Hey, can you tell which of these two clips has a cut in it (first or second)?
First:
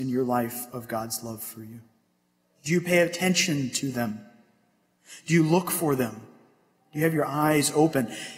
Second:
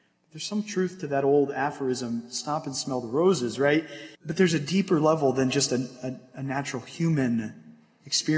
second